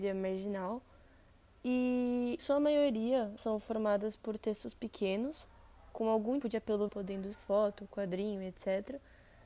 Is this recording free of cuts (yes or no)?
no